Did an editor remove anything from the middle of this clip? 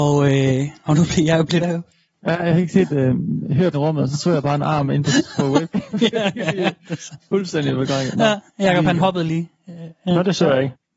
yes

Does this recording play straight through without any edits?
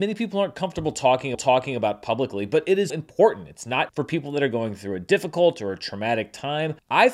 no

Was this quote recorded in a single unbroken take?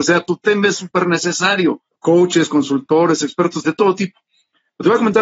no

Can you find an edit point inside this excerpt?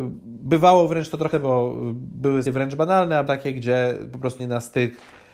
yes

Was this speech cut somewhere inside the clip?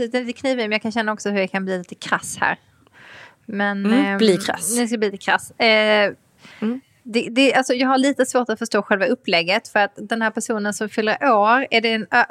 yes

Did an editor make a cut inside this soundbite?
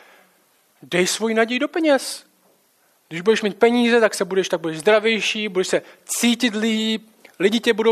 no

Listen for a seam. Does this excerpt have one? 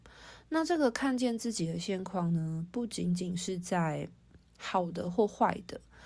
no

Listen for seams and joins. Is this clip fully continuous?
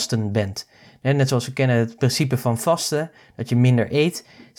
yes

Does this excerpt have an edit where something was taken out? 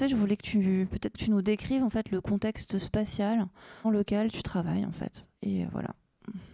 yes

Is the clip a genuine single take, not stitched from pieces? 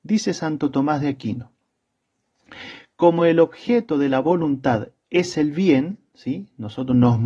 yes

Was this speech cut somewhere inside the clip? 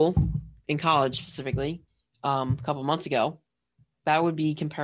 no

